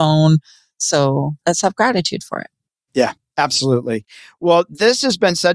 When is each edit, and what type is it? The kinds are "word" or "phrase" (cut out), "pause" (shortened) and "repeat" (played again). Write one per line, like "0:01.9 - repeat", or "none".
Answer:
0:01.4 - pause